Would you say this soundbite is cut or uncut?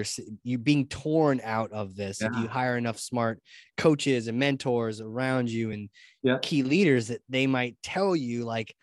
uncut